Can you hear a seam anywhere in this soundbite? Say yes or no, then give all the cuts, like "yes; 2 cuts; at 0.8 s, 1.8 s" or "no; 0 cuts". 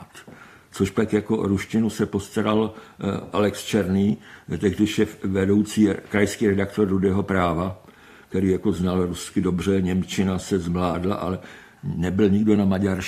no; 0 cuts